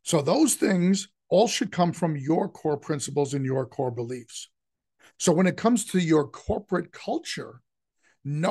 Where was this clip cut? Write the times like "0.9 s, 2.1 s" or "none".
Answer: none